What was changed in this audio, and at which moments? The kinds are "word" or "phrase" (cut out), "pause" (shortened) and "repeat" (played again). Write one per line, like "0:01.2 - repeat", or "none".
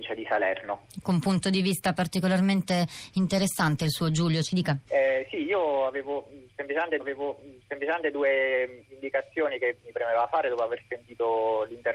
0:04.9 - pause
0:07.0 - repeat
0:09.8 - word